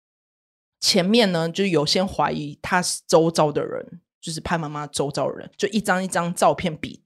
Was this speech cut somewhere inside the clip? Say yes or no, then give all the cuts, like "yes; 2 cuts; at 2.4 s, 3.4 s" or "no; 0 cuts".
yes; 1 cut; at 5.5 s